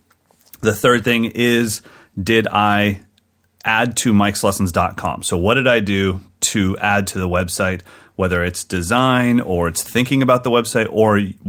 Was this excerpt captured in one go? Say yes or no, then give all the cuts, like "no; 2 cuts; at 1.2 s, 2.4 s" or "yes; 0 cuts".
yes; 0 cuts